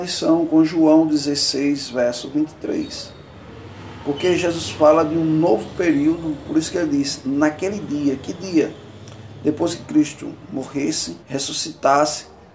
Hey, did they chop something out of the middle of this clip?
yes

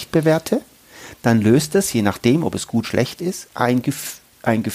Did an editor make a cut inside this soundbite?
yes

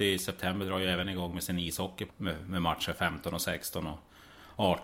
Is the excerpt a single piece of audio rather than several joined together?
no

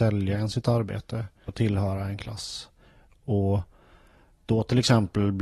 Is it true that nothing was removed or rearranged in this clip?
no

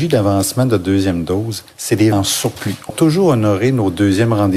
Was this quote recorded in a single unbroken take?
no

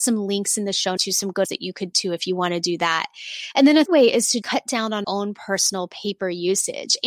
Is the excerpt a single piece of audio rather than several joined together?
no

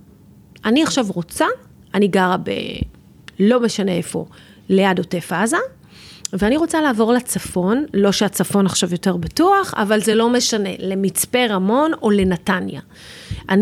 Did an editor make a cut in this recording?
no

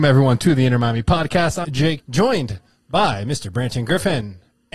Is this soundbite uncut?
no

